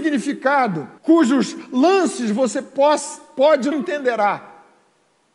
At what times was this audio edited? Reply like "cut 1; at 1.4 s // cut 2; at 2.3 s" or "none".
cut 1; at 1.0 s // cut 2; at 3.7 s

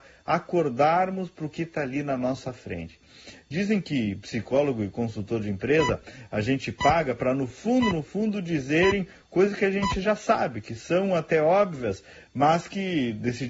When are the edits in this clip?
none

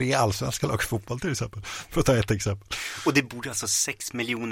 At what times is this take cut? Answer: none

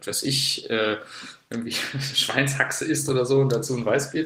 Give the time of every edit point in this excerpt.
none

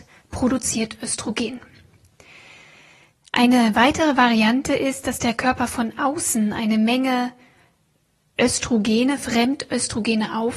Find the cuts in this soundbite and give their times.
none

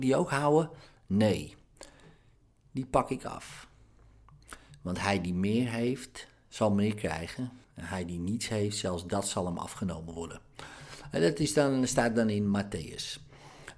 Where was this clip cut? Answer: cut 1; at 7.6 s

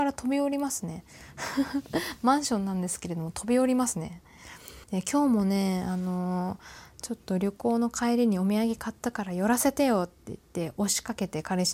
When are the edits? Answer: cut 1; at 4.8 s

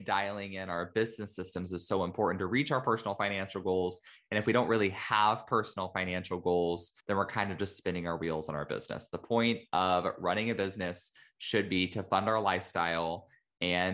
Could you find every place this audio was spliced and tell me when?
cut 1; at 7.0 s

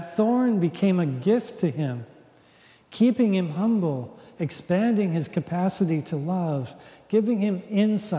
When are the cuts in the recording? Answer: none

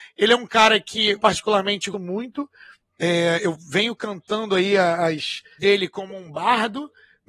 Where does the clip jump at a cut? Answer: cut 1; at 1.2 s // cut 2; at 1.9 s // cut 3; at 5.6 s

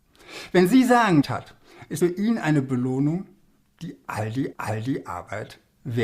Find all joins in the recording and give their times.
cut 1; at 1.2 s // cut 2; at 2.0 s // cut 3; at 4.5 s

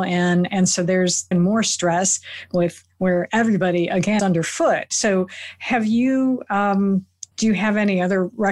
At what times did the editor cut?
cut 1; at 1.3 s // cut 2; at 4.2 s // cut 3; at 7.3 s

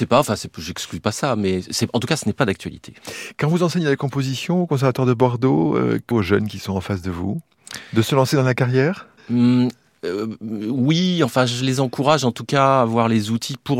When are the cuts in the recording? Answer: cut 1; at 6.1 s // cut 2; at 9.2 s

